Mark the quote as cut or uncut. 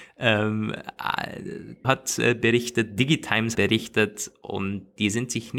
cut